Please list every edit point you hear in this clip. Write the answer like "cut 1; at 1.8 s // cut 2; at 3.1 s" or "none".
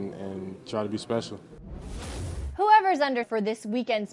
cut 1; at 1.0 s // cut 2; at 3.2 s